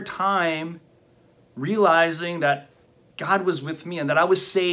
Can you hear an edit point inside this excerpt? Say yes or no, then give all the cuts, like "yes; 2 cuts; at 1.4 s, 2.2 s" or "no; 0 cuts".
no; 0 cuts